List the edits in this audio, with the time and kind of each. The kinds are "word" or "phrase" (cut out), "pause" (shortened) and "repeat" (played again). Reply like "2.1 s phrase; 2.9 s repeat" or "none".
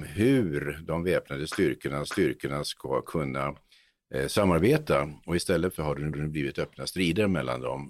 2.1 s repeat; 5.8 s phrase; 6.1 s repeat